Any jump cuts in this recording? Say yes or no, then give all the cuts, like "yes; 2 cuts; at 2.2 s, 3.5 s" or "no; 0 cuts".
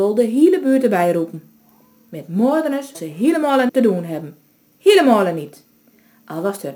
yes; 2 cuts; at 2.9 s, 3.7 s